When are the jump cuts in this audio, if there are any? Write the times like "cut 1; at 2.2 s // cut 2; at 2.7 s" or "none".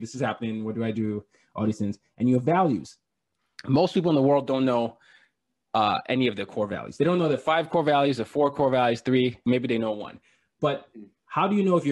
cut 1; at 9.5 s